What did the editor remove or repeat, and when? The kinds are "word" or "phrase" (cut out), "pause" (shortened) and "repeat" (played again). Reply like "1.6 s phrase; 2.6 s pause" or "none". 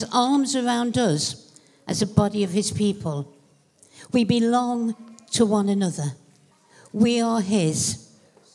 none